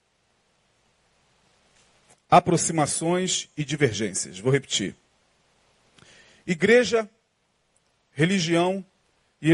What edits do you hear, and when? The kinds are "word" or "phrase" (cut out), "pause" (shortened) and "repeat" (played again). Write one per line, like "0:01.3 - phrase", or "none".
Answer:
none

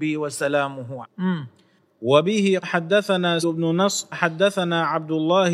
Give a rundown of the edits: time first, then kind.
0:01.0 - word
0:02.6 - word
0:03.4 - word
0:04.1 - word

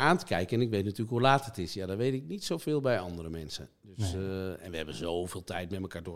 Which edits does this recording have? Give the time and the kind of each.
none

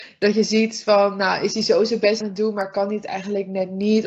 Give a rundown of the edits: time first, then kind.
0:02.2 - word

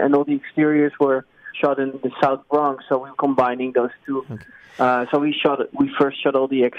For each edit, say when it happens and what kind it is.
0:01.5 - word
0:01.9 - word
0:03.1 - word
0:05.7 - word

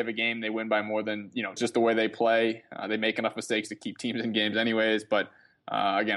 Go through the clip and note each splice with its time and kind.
0:01.6 - phrase

